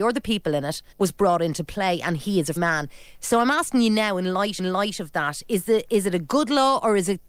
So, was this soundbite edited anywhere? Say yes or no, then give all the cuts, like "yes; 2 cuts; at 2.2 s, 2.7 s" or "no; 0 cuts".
yes; 3 cuts; at 0.9 s, 2.6 s, 4.6 s